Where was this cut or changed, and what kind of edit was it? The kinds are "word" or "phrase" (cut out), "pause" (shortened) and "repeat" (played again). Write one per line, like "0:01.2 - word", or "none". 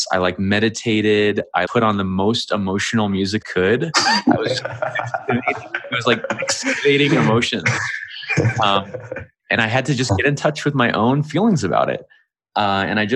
0:01.6 - word
0:03.4 - word

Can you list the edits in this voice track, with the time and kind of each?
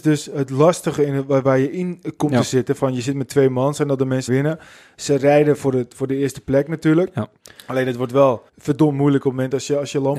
0:04.3 - phrase
0:07.4 - pause
0:08.5 - pause

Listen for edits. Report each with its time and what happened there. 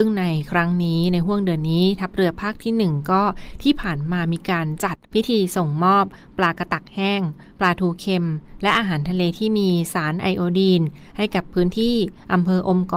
0:05.0 - pause

